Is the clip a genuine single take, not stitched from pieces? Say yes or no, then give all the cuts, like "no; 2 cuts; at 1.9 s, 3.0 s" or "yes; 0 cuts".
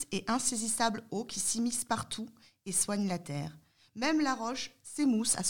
yes; 0 cuts